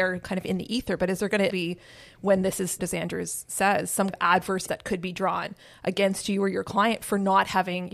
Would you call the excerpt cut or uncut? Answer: cut